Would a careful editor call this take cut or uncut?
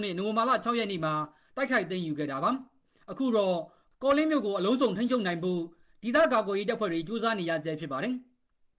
uncut